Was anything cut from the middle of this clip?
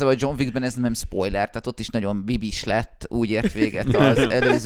no; 0 cuts

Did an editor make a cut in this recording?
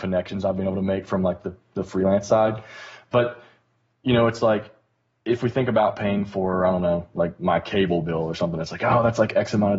no; 0 cuts

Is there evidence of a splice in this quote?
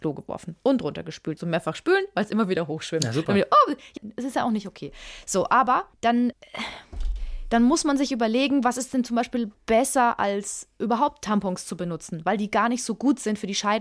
yes; 3 cuts; at 1.4 s, 4.0 s, 5.9 s

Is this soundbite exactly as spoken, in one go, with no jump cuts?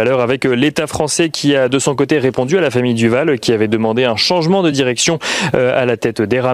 yes; 0 cuts

